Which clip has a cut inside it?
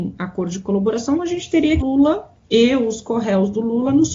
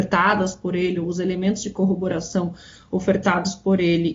first; 3 cuts; at 1.2 s, 1.8 s, 2.4 s

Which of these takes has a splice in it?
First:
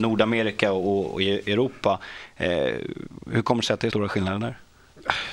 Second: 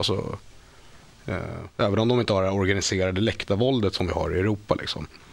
first; 1 cut; at 3.9 s

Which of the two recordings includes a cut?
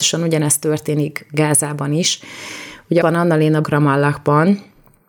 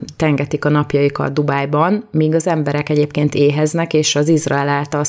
first; 2 cuts; at 3.0 s, 3.6 s

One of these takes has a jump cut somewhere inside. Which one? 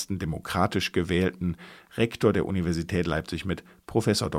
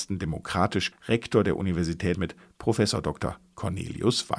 second; 2 cuts; at 0.9 s, 2.1 s

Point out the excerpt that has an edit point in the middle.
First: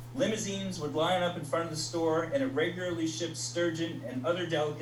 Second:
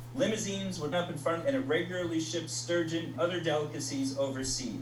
second; 3 cuts; at 0.9 s, 1.4 s, 3.1 s

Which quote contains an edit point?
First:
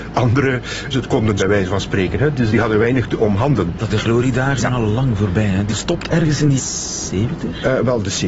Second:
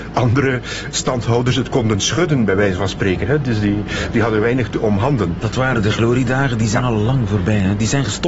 first; 7 cuts; at 0.9 s, 1.4 s, 2.5 s, 3.9 s, 4.6 s, 5.7 s, 6.6 s

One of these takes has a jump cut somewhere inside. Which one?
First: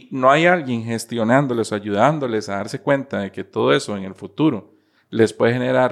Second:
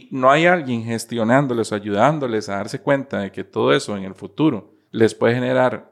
second; 1 cut; at 4.8 s

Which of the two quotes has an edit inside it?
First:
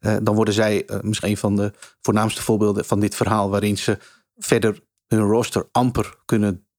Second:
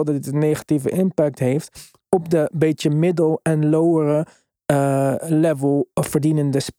first; 1 cut; at 1.2 s

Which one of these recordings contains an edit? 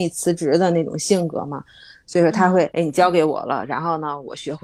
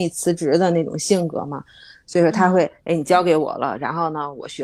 first; 1 cut; at 2.7 s

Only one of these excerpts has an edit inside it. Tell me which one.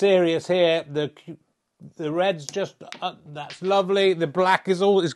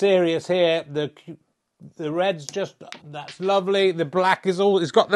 second; 1 cut; at 3.0 s

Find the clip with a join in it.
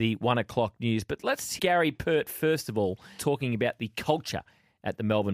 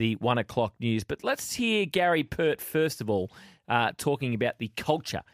first; 2 cuts; at 1.6 s, 3.2 s

